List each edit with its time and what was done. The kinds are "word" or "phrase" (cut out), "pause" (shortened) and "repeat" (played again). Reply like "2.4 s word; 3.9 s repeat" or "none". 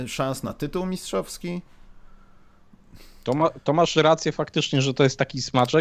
none

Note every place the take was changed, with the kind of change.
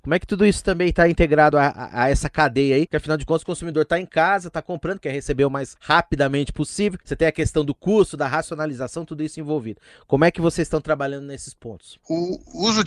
none

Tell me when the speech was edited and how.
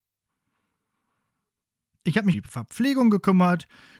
2.3 s word

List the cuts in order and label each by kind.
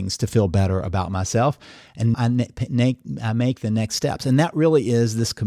2.1 s word

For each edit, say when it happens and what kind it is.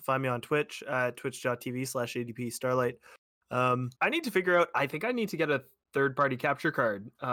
3.9 s pause

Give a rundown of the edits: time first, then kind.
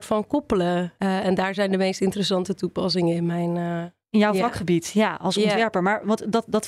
none

